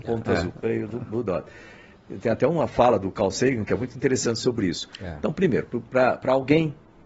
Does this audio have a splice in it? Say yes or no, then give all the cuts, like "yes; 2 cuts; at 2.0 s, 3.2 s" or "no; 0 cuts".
no; 0 cuts